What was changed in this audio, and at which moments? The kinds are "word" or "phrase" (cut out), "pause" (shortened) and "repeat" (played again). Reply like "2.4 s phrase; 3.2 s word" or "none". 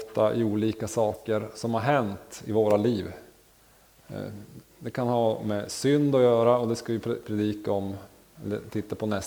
none